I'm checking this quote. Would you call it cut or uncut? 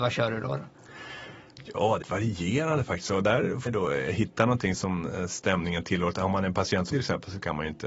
cut